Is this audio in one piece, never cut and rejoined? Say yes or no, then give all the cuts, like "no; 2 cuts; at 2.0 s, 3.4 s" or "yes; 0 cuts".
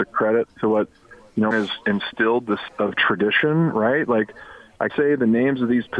no; 3 cuts; at 1.5 s, 2.7 s, 4.9 s